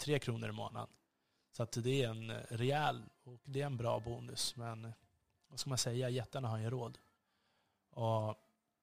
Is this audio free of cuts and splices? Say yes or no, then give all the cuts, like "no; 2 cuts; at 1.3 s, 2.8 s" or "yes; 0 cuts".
yes; 0 cuts